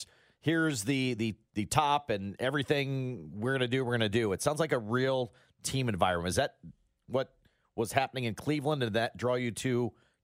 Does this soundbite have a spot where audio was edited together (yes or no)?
no